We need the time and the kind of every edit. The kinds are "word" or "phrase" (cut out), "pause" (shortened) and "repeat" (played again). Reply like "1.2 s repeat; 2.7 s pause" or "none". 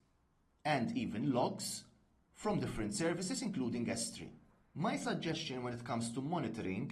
none